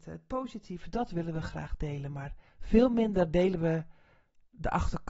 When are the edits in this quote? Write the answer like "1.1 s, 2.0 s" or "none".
2.5 s

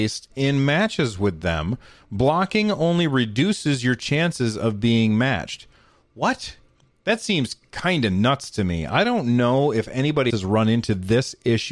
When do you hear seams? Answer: 10.3 s

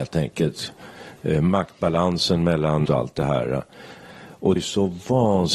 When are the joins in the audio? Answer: 2.8 s, 4.6 s

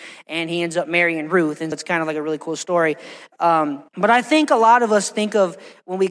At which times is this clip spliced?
1.7 s, 3.9 s

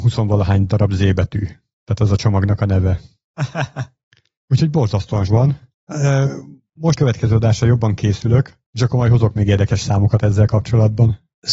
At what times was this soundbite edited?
5.3 s, 7.0 s

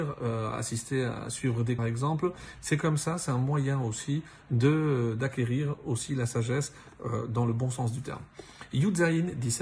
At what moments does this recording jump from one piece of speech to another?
1.8 s

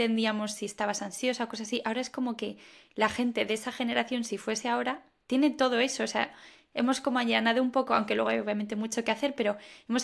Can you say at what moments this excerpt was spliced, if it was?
none

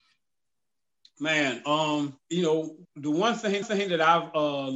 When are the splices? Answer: 2.2 s, 2.8 s, 3.6 s

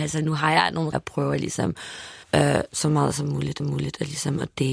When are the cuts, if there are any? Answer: 0.9 s, 2.2 s, 3.6 s

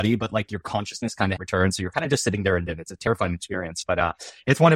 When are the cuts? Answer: 1.4 s, 2.7 s

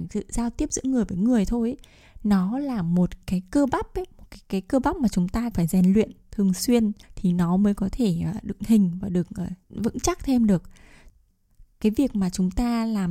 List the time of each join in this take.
5.5 s, 7.0 s, 8.6 s, 9.6 s

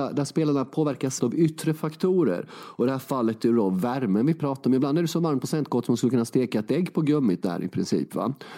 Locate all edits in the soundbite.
1.2 s

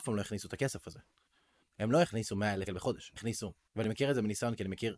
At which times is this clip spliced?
2.7 s, 3.2 s, 3.7 s

